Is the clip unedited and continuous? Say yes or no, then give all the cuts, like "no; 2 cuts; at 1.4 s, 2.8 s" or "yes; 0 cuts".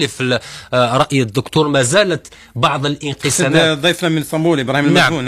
yes; 0 cuts